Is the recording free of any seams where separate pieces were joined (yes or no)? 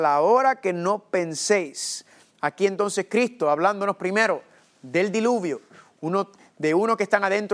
yes